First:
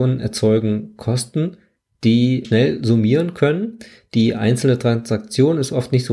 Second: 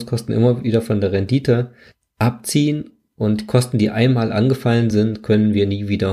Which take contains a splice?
first; 1 cut; at 2.4 s

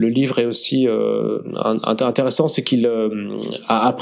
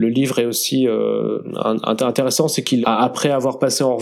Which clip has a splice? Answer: second; 1 cut; at 2.8 s

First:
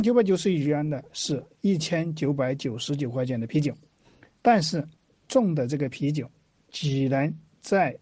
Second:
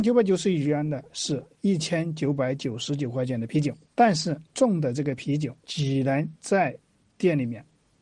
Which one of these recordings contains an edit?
second; 4 cuts; at 3.9 s, 4.5 s, 5.6 s, 6.4 s

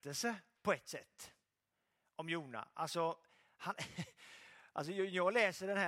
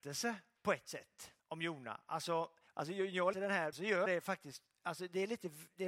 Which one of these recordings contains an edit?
second; 5 cuts; at 1.4 s, 2.7 s, 3.3 s, 3.7 s, 4.1 s

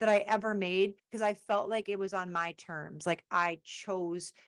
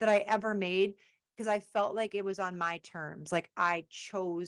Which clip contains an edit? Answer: first; 1 cut; at 1.0 s

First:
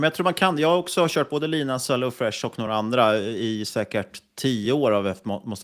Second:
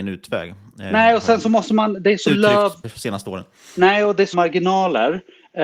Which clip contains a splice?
second; 2 cuts; at 2.8 s, 4.3 s

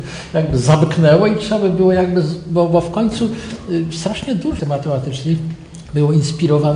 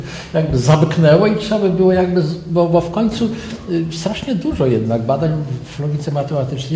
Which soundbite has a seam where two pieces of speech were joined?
first; 1 cut; at 4.6 s

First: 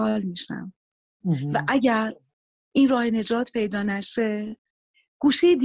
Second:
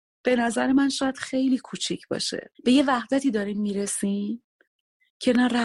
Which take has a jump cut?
second; 1 cut; at 2.5 s

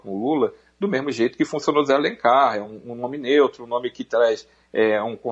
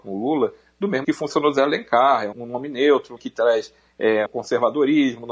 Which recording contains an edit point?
second; 4 cuts; at 1.0 s, 2.3 s, 3.2 s, 4.3 s

